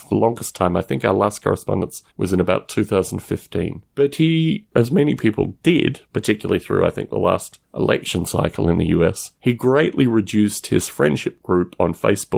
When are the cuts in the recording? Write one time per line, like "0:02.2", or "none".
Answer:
0:02.1
0:03.9
0:06.1
0:07.6
0:09.4